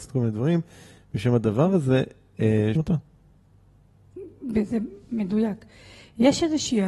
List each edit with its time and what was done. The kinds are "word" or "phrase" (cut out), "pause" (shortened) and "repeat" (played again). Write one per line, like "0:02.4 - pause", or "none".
0:02.8 - phrase